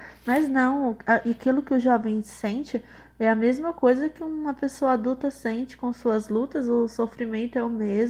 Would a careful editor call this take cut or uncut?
uncut